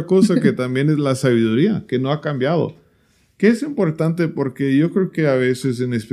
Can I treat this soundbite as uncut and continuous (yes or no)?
yes